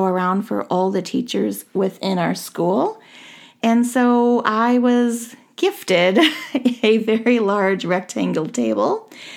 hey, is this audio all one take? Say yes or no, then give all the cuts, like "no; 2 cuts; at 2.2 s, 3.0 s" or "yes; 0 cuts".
yes; 0 cuts